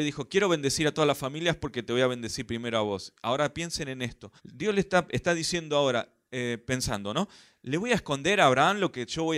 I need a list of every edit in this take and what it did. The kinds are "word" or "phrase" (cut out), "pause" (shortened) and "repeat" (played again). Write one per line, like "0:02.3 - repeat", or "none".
0:04.4 - pause